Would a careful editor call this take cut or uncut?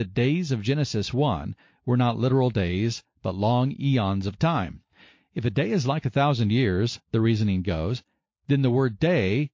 uncut